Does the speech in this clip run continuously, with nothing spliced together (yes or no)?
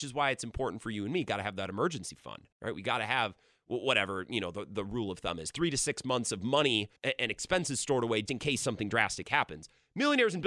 no